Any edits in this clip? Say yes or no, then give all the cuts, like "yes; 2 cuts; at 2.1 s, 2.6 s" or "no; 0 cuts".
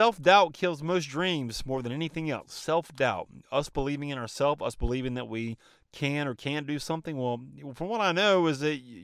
no; 0 cuts